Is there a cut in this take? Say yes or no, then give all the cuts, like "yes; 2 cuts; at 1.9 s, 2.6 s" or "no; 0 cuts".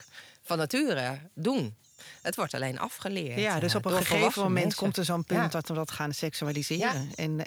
no; 0 cuts